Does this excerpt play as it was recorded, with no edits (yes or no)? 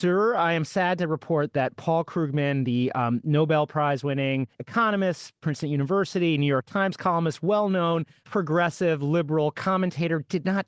no